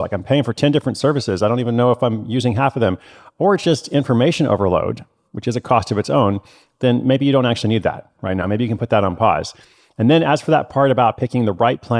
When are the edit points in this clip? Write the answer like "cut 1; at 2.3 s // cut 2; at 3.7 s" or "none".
none